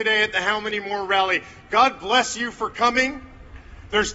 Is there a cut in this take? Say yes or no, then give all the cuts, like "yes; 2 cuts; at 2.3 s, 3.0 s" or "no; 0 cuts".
no; 0 cuts